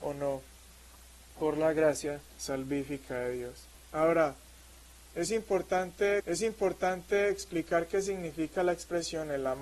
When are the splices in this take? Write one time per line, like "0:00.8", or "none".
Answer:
0:02.3
0:03.7
0:06.2